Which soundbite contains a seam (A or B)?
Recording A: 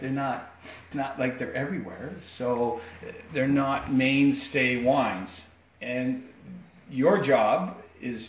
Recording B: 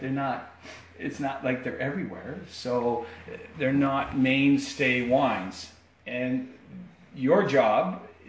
A